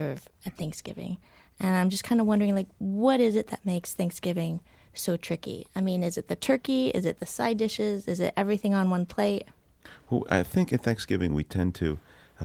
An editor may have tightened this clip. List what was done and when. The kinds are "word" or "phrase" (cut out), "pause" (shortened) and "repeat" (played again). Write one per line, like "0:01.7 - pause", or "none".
none